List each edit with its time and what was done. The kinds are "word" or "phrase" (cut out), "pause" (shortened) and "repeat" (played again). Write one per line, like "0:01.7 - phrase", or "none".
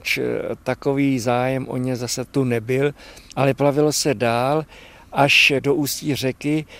none